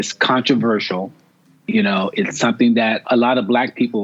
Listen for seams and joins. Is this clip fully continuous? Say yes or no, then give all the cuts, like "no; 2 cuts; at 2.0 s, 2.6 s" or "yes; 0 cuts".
no; 1 cut; at 3.0 s